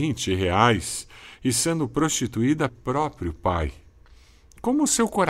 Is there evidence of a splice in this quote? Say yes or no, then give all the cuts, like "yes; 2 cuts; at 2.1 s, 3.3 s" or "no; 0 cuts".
yes; 1 cut; at 2.7 s